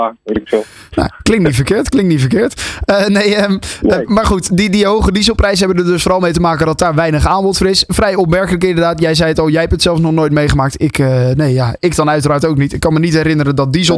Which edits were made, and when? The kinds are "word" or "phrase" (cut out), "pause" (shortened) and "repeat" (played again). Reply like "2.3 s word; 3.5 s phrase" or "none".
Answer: none